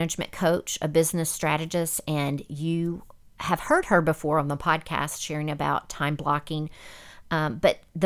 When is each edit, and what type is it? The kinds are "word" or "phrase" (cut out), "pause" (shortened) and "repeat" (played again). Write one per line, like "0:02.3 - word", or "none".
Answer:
none